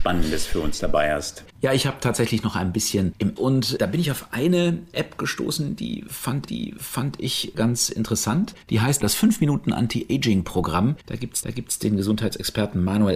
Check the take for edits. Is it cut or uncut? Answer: cut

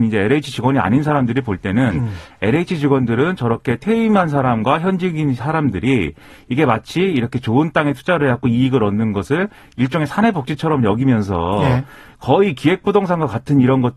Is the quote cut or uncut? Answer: uncut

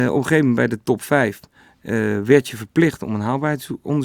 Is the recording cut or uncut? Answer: uncut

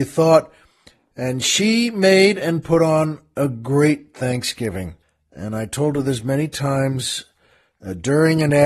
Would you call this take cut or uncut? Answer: cut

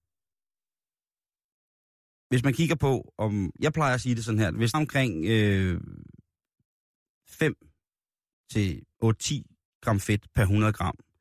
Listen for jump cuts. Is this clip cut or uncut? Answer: cut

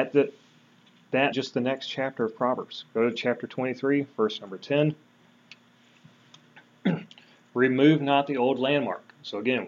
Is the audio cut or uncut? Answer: cut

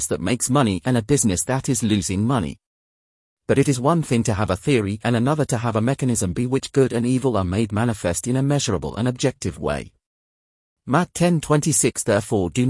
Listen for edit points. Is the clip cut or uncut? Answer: uncut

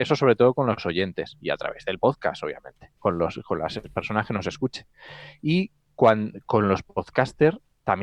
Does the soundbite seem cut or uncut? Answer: cut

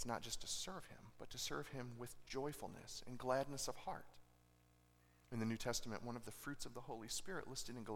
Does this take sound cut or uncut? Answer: uncut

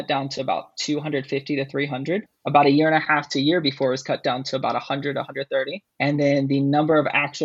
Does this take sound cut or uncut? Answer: cut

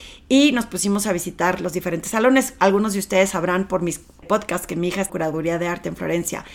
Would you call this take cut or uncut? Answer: cut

